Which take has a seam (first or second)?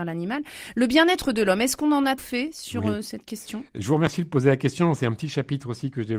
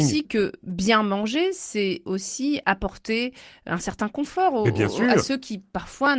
first